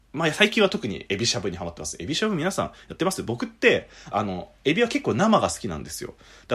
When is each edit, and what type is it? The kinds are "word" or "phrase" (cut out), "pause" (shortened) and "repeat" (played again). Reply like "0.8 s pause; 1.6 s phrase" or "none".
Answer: 4.1 s phrase